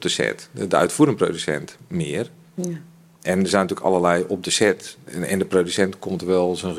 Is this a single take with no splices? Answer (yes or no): yes